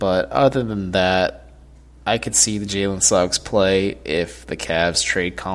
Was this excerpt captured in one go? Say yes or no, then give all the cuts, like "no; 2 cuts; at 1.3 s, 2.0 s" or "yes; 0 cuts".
yes; 0 cuts